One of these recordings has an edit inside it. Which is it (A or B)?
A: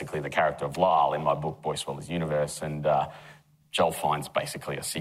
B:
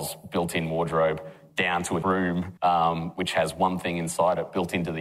B